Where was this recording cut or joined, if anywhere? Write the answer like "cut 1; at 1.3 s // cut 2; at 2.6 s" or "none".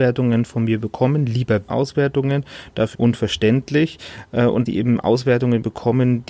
cut 1; at 1.7 s // cut 2; at 2.9 s // cut 3; at 4.7 s

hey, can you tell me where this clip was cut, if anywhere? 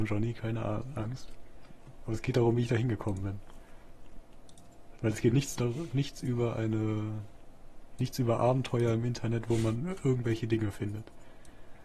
none

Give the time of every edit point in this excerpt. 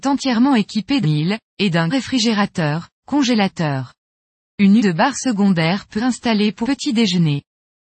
cut 1; at 1.0 s // cut 2; at 1.9 s // cut 3; at 4.8 s // cut 4; at 6.0 s // cut 5; at 6.6 s

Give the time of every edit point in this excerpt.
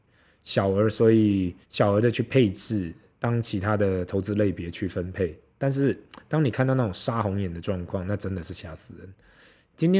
cut 1; at 1.6 s

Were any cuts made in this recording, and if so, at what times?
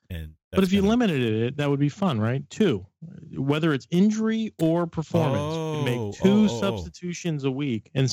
none

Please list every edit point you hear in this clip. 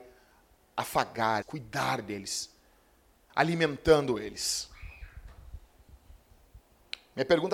cut 1; at 1.4 s // cut 2; at 3.3 s

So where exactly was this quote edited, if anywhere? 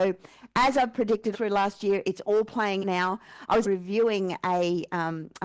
cut 1; at 1.3 s // cut 2; at 2.8 s // cut 3; at 3.6 s

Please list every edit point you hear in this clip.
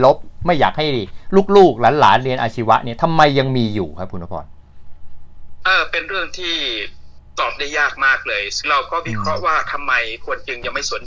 cut 1; at 8.6 s

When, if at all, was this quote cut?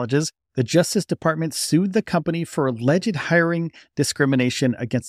none

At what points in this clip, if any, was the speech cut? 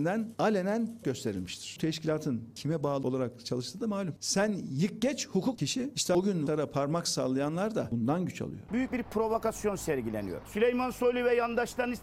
cut 1; at 1.0 s // cut 2; at 5.5 s // cut 3; at 6.5 s

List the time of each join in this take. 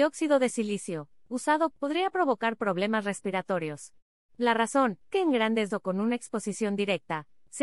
cut 1; at 1.7 s // cut 2; at 4.1 s // cut 3; at 5.1 s // cut 4; at 5.7 s

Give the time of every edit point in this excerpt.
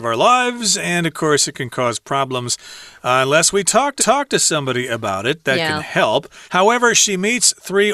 cut 1; at 4.0 s // cut 2; at 6.5 s

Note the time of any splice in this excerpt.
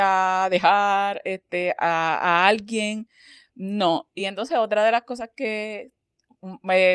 none

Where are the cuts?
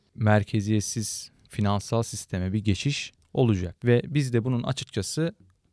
none

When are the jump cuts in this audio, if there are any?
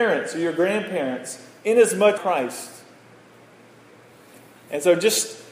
cut 1; at 2.2 s

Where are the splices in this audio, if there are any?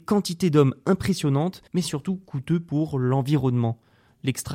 cut 1; at 1.7 s

